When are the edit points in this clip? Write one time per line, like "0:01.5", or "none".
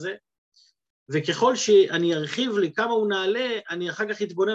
none

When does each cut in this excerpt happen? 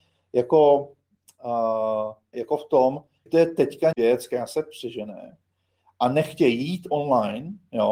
0:02.3
0:03.3
0:03.9

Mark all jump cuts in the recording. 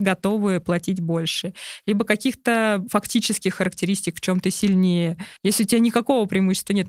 0:05.4

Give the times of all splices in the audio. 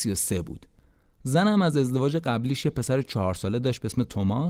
none

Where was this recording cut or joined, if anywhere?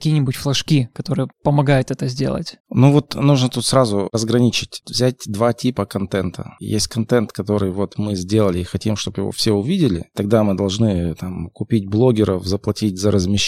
0:01.3
0:02.6

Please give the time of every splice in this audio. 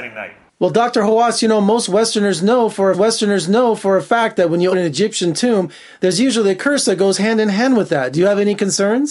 0:02.9
0:04.7

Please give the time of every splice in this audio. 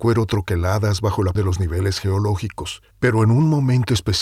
0:01.4
0:02.9

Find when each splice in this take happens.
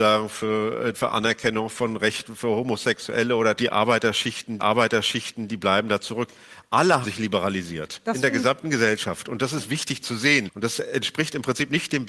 0:00.9
0:03.6
0:04.6
0:07.0
0:10.0

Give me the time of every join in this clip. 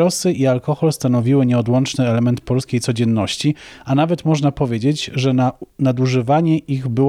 none

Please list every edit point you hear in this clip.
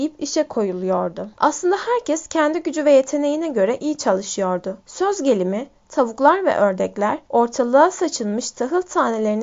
0:01.3
0:04.8
0:07.2

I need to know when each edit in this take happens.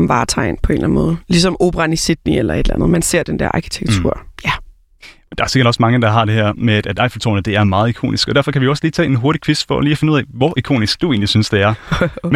none

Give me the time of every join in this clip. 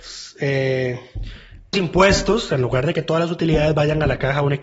0:01.7

